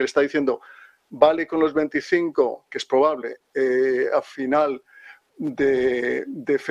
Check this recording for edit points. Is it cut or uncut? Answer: uncut